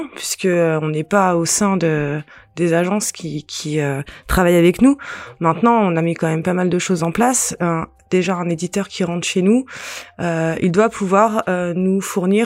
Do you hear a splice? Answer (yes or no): no